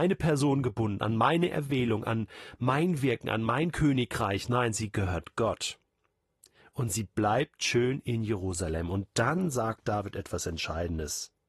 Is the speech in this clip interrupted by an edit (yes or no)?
no